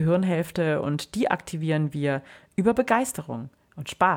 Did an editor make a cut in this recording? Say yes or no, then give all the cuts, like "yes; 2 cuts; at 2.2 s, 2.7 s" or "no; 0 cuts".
no; 0 cuts